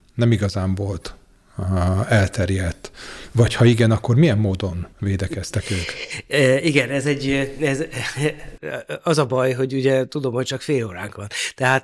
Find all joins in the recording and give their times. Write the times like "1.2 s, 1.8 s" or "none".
4.9 s